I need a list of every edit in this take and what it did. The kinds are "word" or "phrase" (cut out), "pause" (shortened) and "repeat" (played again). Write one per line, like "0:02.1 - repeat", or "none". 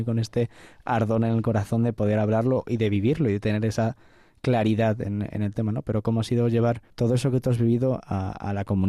0:06.9 - pause